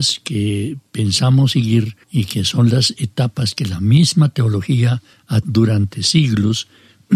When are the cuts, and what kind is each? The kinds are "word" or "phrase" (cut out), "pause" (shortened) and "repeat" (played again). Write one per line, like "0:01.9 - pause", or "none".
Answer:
0:02.0 - pause
0:05.4 - word